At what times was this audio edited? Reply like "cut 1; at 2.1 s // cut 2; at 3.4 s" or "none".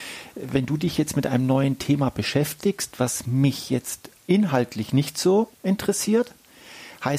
cut 1; at 5.5 s